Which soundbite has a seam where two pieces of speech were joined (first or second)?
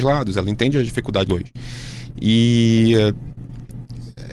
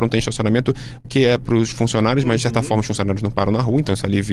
first